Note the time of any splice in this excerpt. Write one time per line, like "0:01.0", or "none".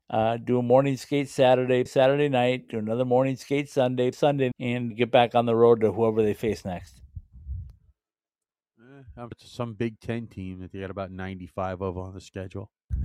0:01.9
0:04.1
0:04.5
0:04.9
0:09.3